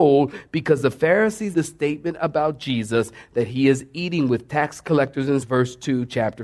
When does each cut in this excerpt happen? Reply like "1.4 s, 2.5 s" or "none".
1.5 s, 5.4 s